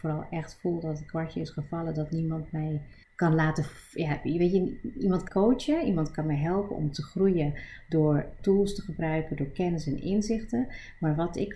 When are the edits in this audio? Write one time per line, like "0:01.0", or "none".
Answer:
0:03.0
0:05.3
0:08.4